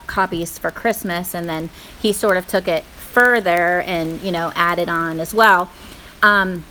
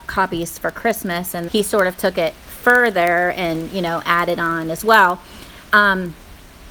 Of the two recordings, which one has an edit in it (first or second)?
second